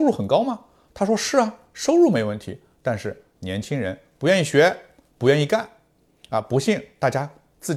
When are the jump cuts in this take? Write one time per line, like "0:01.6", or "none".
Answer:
none

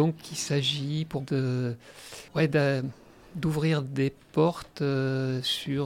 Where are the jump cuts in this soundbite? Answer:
0:01.2
0:02.3

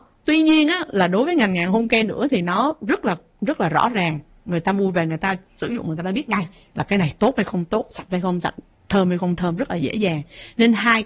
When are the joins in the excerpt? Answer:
none

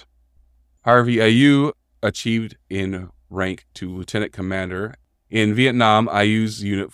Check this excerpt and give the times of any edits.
none

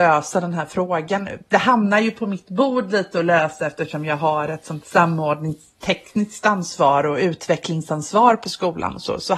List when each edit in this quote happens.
0:04.8

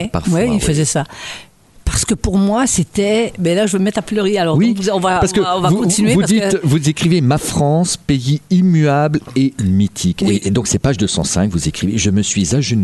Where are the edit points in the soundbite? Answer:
none

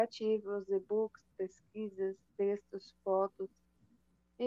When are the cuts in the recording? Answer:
none

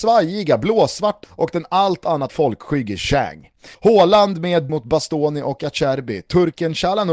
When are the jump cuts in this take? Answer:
0:01.2
0:02.3
0:03.7
0:04.7

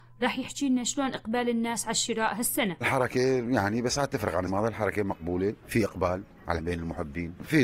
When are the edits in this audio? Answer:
0:02.8
0:04.5
0:06.6

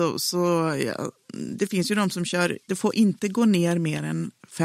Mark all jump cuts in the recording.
0:02.7

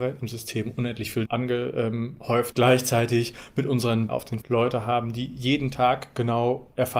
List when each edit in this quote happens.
0:01.2
0:02.5
0:04.1
0:04.4

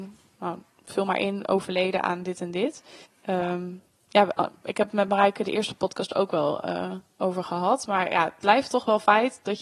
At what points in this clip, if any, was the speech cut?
0:03.0

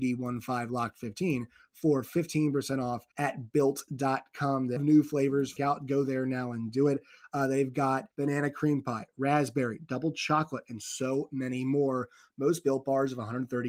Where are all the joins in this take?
0:03.1
0:04.8
0:05.6
0:08.1

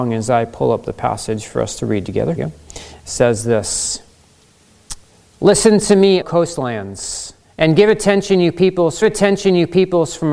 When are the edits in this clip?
0:02.4
0:05.1
0:06.2
0:07.4
0:09.0

